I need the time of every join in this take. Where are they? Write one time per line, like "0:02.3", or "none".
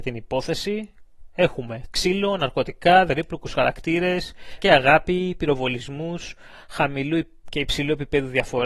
0:03.1
0:04.6

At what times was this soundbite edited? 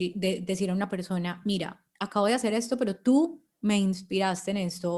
none

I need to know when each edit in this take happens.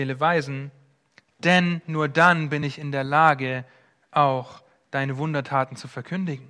none

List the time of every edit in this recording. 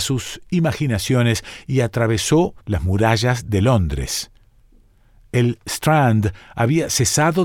0:02.6

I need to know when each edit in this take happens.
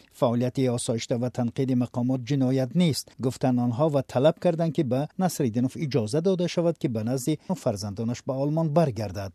0:03.1
0:05.1
0:07.5

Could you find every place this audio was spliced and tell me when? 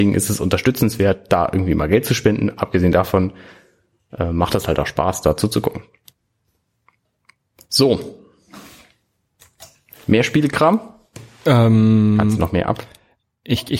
none

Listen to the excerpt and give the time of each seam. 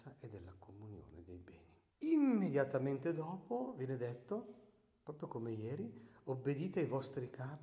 0:01.9

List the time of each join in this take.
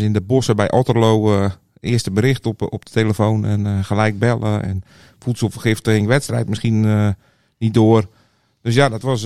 none

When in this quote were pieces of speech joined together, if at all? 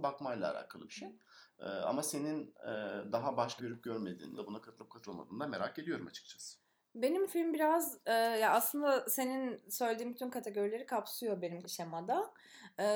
0:03.6
0:04.4
0:07.3
0:11.6

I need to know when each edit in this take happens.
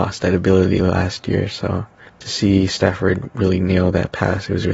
0:02.1

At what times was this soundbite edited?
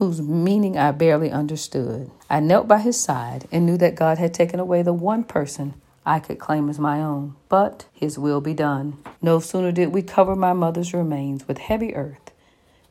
0:02.2
0:05.9
0:07.9
0:09.2

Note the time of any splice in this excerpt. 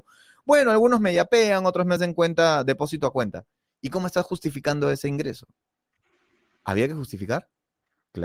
none

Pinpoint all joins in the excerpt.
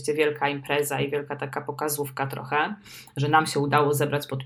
none

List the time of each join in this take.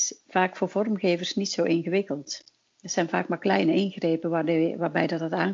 none

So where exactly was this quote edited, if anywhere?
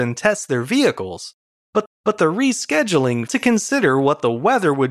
0:01.9
0:03.3

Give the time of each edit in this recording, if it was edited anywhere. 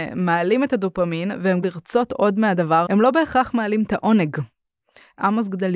0:01.6
0:02.9

